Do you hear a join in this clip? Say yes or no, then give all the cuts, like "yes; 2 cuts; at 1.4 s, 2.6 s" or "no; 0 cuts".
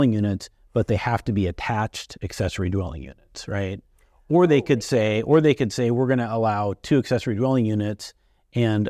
no; 0 cuts